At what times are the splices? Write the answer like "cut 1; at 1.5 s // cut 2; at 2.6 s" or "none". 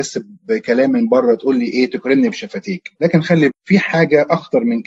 cut 1; at 2.9 s // cut 2; at 3.5 s

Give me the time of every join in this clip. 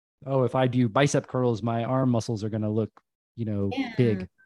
none

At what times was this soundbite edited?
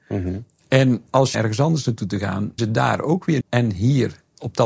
cut 1; at 1.3 s // cut 2; at 2.6 s // cut 3; at 3.4 s

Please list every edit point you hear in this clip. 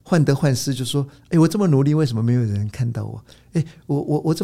none

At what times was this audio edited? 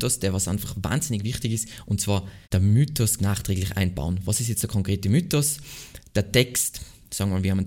cut 1; at 2.4 s // cut 2; at 3.2 s

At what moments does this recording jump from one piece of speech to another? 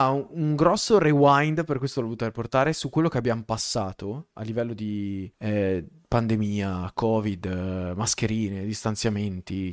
cut 1; at 5.3 s

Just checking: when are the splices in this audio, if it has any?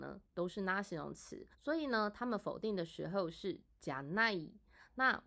cut 1; at 1.5 s

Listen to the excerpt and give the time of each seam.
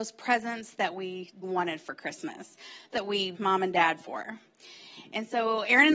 cut 1; at 1.4 s // cut 2; at 2.9 s // cut 3; at 3.3 s

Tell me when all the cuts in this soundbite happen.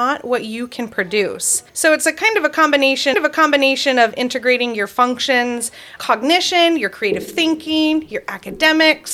cut 1; at 1.7 s // cut 2; at 3.1 s // cut 3; at 6.0 s

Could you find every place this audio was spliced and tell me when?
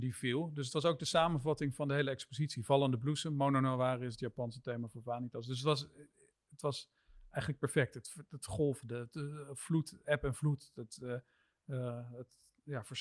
none

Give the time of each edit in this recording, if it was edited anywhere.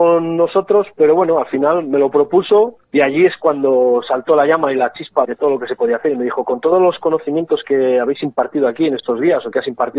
cut 1; at 2.8 s // cut 2; at 5.2 s

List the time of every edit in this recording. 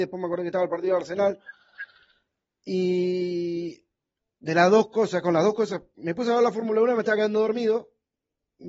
none

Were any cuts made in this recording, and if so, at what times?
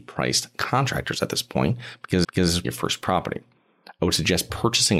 cut 1; at 2.2 s // cut 2; at 2.6 s

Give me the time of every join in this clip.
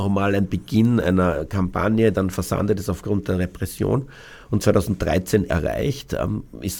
cut 1; at 2.1 s // cut 2; at 5.5 s

